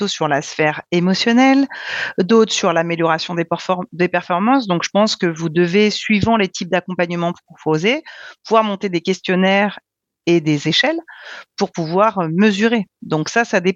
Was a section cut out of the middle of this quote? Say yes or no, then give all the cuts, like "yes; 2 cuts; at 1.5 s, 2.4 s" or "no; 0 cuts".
no; 0 cuts